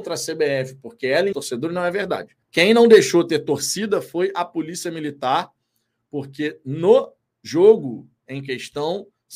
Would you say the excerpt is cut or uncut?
cut